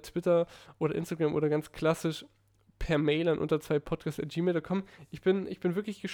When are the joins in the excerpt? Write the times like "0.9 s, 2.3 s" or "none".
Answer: none